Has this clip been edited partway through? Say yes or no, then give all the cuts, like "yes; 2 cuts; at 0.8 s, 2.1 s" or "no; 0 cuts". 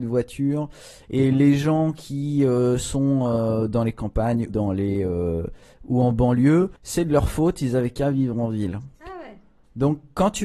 yes; 3 cuts; at 4.5 s, 6.8 s, 8.9 s